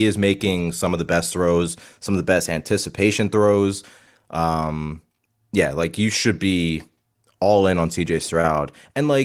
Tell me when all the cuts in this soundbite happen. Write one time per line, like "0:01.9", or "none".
none